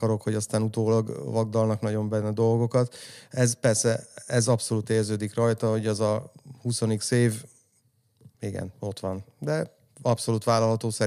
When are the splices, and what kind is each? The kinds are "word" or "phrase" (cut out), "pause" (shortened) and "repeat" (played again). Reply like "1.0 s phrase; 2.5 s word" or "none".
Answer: 8.3 s pause